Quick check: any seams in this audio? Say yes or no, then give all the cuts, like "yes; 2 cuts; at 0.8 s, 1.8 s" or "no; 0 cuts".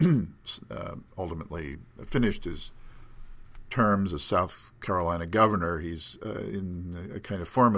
no; 0 cuts